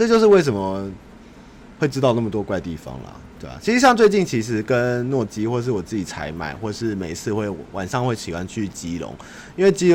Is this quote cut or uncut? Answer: uncut